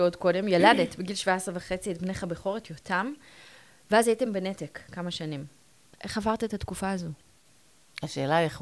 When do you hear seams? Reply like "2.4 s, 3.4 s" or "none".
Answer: none